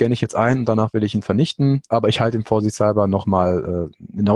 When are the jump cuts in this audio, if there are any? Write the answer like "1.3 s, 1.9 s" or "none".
1.9 s